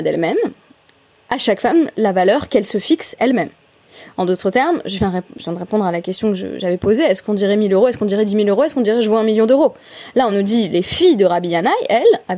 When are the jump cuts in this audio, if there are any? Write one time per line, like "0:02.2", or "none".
none